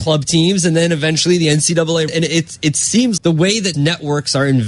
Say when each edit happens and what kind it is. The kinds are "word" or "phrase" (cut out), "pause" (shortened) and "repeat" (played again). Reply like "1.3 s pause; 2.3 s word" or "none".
2.1 s word; 3.2 s word; 3.7 s word

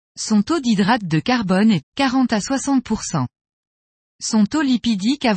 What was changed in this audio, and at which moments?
1.8 s word

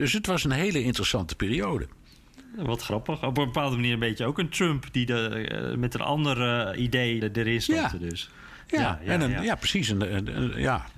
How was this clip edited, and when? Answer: 7.2 s word

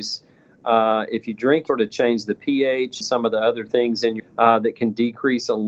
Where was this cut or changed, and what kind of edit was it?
1.7 s phrase; 3.0 s word; 4.2 s word

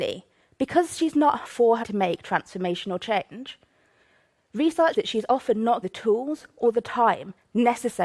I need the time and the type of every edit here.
1.4 s word; 1.8 s word; 4.9 s word; 5.8 s word

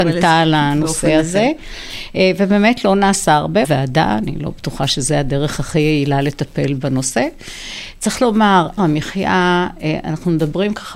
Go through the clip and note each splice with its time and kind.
3.6 s word; 8.8 s word

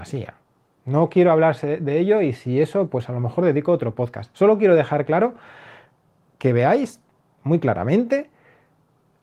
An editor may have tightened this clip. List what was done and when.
none

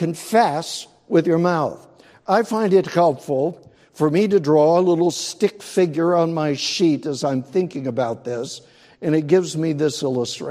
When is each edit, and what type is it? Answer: none

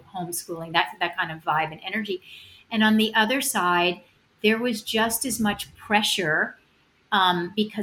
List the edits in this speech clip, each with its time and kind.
none

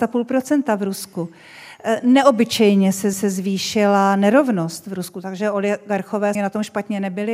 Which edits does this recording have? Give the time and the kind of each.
3.1 s repeat; 6.3 s word

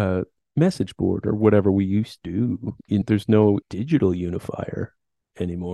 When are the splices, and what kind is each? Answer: 2.2 s word; 3.0 s word; 3.6 s word

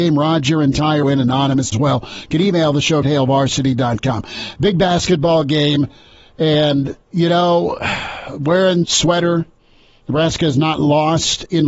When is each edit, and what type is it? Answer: 1.0 s word; 1.7 s phrase; 3.0 s phrase; 7.0 s pause; 8.8 s phrase

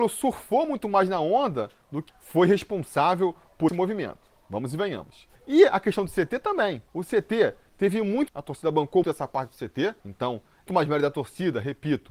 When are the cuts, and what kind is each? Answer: 2.1 s word; 3.7 s word; 5.4 s pause; 6.9 s pause; 8.3 s phrase; 9.0 s word; 10.0 s pause; 10.7 s word

